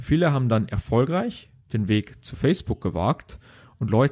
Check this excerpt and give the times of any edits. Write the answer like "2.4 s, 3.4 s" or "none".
none